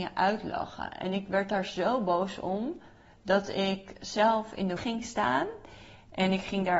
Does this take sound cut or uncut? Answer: cut